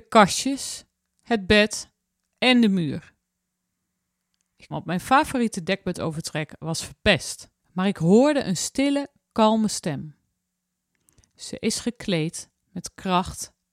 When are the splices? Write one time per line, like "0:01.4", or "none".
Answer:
0:04.7
0:07.6